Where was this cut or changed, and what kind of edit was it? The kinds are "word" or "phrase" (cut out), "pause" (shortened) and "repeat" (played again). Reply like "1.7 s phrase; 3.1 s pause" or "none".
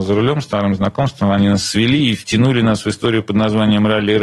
none